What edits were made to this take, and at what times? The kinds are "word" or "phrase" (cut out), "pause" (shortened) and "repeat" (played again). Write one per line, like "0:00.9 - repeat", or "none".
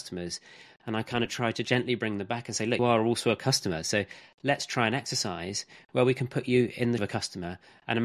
0:02.8 - word
0:07.0 - word